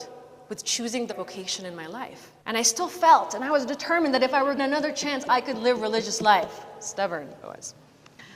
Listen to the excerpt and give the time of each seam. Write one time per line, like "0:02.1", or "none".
0:01.1
0:02.4
0:04.6
0:07.4